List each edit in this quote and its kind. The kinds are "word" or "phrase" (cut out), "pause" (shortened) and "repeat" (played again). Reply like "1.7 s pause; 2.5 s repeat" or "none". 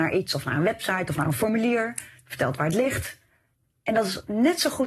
none

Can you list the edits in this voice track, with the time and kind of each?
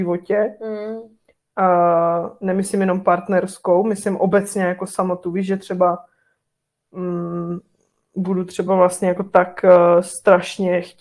none

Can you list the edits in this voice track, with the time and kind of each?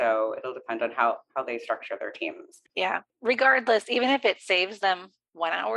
2.7 s pause

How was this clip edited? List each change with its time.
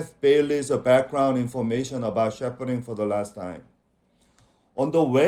none

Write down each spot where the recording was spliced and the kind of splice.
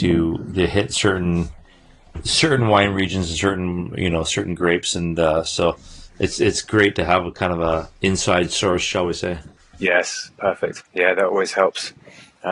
8.0 s pause; 9.6 s pause; 10.9 s pause

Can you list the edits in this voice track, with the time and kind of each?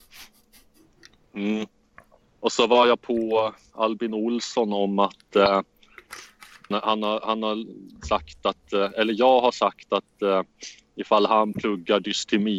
6.7 s word

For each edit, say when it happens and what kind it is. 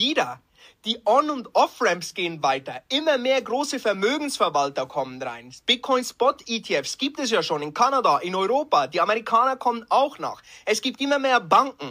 none

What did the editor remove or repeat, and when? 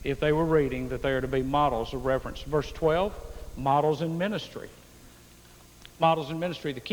none

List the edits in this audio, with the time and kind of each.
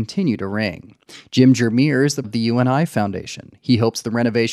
2.2 s word

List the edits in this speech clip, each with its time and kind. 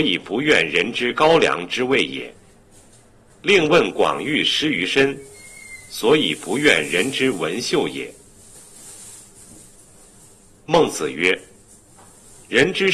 none

